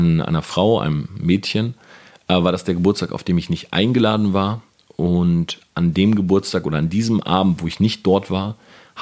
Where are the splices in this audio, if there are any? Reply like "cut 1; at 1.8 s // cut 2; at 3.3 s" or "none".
none